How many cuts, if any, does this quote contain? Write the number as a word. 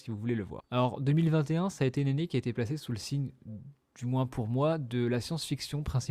zero